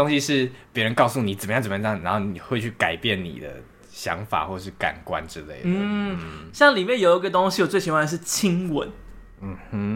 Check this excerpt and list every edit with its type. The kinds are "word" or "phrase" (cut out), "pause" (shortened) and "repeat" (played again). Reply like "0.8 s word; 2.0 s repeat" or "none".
none